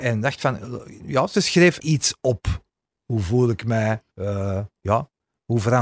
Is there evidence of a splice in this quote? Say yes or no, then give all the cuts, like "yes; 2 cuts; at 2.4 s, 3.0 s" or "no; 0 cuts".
yes; 3 cuts; at 1.8 s, 2.9 s, 4.1 s